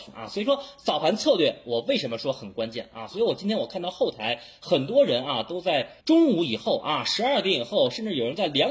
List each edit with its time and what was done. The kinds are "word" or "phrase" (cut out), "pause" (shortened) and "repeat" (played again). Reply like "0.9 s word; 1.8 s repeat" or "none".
6.0 s pause